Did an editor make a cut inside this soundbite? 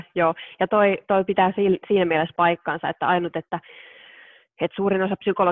no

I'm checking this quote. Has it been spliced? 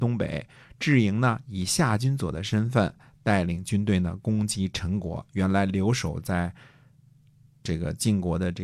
no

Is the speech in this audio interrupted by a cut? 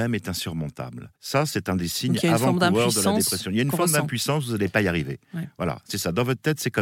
yes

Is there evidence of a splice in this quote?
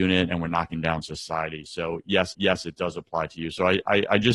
yes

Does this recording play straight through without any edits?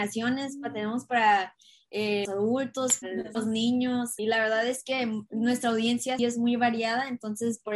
no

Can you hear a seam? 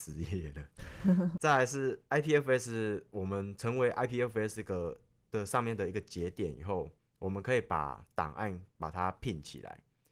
no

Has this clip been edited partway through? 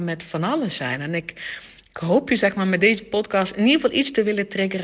no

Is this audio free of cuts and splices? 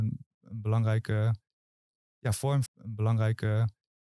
no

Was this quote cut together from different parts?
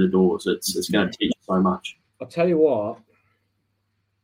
yes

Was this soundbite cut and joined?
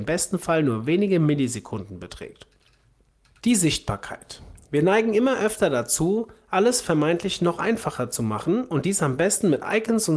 no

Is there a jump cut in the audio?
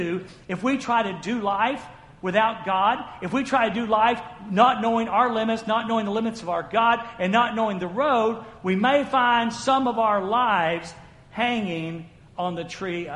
no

